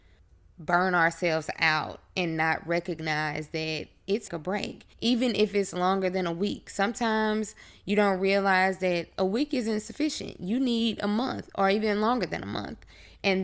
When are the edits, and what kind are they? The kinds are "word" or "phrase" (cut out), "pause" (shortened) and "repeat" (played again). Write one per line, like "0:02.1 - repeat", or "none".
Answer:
0:04.3 - phrase
0:04.9 - pause